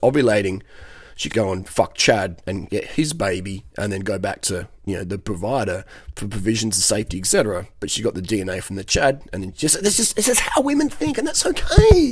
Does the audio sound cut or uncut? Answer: cut